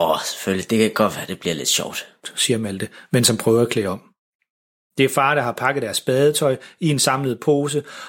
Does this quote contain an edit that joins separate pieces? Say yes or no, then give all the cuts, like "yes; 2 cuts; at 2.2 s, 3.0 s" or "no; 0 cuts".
no; 0 cuts